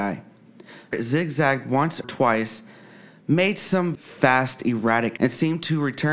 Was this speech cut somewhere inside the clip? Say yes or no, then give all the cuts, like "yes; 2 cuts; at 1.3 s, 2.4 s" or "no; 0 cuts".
yes; 4 cuts; at 0.9 s, 2.0 s, 3.9 s, 5.2 s